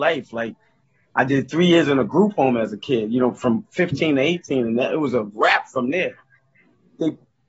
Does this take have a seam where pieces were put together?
no; 0 cuts

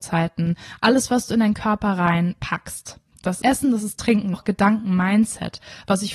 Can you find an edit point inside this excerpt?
yes; 2 cuts; at 3.4 s, 4.3 s

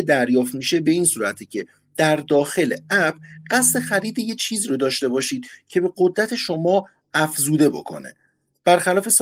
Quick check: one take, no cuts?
yes; 0 cuts

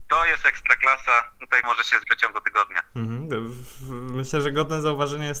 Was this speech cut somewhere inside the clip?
yes; 2 cuts; at 1.6 s, 2.0 s

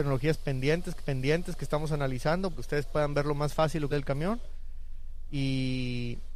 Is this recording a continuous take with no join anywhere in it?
no; 3 cuts; at 1.0 s, 2.5 s, 3.9 s

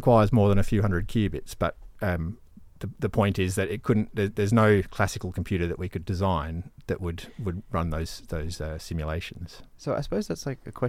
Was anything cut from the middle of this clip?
no; 0 cuts

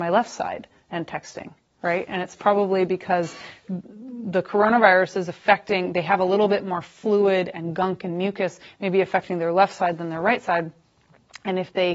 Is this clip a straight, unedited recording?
yes; 0 cuts

